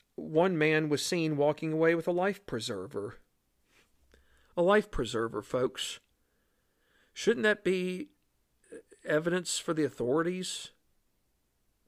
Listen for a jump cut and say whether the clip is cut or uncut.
uncut